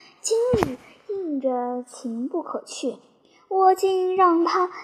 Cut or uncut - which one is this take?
uncut